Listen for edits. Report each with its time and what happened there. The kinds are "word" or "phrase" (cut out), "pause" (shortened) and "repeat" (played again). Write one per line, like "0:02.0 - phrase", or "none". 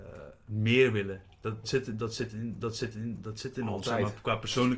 0:01.6 - word
0:02.6 - repeat